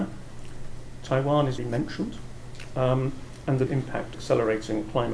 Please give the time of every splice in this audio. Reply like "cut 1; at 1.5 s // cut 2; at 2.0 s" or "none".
cut 1; at 1.6 s // cut 2; at 3.7 s // cut 3; at 4.1 s